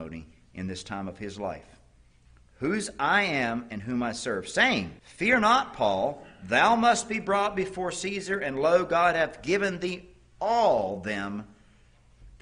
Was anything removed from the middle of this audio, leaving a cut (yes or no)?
yes